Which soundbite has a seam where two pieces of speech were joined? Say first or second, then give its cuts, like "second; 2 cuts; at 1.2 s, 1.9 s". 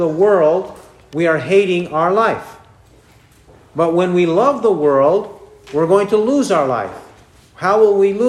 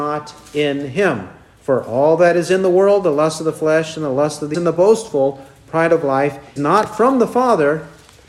second; 2 cuts; at 4.5 s, 6.6 s